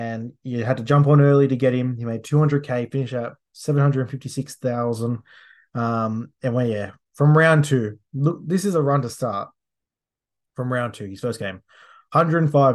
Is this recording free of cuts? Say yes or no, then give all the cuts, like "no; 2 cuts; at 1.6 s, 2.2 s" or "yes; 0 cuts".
yes; 0 cuts